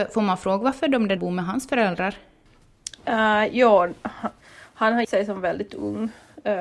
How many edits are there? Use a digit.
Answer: 3